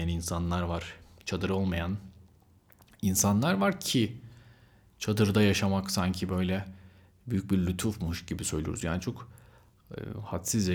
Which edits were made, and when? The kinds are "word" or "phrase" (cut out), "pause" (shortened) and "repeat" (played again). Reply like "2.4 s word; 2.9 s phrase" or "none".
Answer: none